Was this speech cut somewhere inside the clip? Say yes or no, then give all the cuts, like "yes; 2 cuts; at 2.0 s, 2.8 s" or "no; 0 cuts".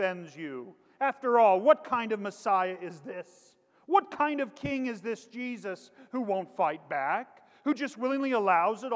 no; 0 cuts